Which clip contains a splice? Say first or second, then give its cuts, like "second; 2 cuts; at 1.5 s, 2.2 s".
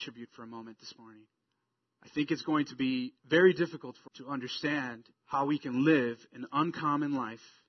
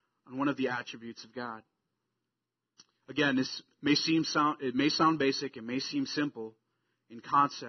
first; 4 cuts; at 1.5 s, 3.2 s, 4.1 s, 5.1 s